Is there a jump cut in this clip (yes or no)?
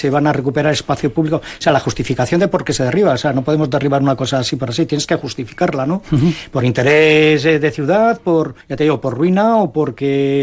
yes